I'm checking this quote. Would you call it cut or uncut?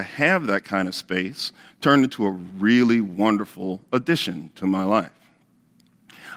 uncut